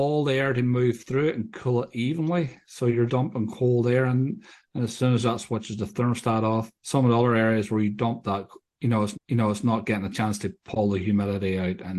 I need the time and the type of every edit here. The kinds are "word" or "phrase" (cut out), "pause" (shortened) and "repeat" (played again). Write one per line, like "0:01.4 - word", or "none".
0:03.1 - word
0:06.8 - pause
0:09.1 - repeat